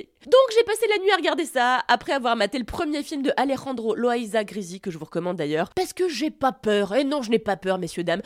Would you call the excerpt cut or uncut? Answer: uncut